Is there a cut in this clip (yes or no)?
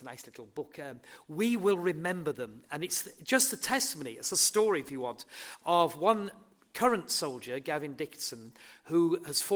no